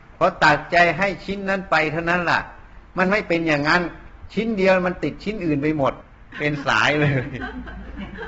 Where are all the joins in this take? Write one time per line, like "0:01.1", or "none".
none